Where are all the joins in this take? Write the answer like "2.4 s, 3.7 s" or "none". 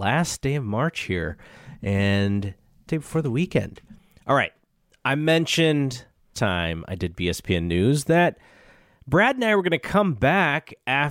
2.9 s, 6.3 s